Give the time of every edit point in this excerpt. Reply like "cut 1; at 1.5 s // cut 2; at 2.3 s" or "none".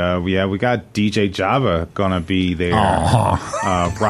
none